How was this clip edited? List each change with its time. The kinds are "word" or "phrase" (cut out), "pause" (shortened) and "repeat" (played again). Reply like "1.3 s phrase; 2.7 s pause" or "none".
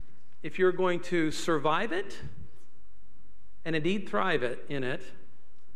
none